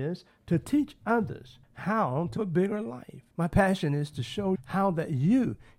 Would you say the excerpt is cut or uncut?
cut